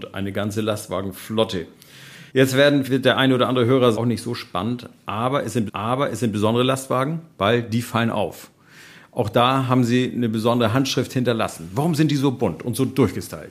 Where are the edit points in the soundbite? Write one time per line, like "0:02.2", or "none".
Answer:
0:02.3
0:02.8
0:03.9
0:05.7

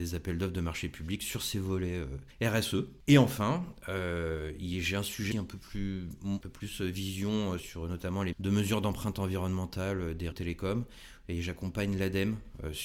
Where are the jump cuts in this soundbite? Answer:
0:05.3
0:06.4
0:07.6
0:08.3
0:10.3

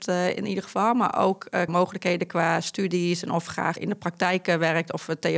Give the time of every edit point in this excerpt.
0:01.7
0:03.5

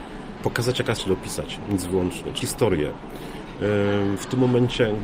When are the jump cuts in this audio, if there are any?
0:01.0
0:02.4

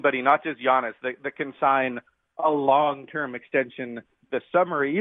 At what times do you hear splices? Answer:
none

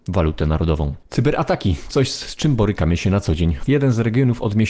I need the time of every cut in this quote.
0:01.0
0:01.9
0:03.7

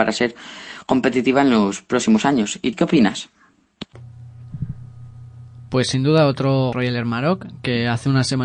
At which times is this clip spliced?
0:02.7
0:06.7

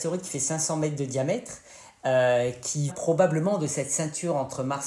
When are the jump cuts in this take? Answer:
0:02.9

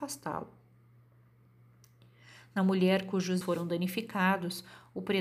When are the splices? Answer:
0:03.4

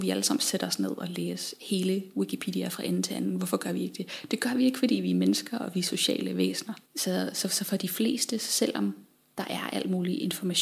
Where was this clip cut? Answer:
0:06.9

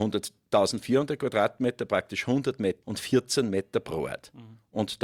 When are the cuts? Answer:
0:02.8

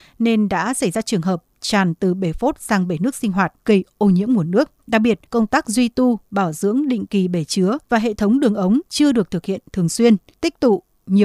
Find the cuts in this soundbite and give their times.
0:03.6
0:04.8
0:05.3
0:07.8
0:08.9
0:10.3

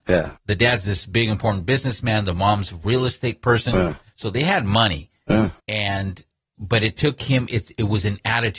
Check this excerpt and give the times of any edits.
0:05.6

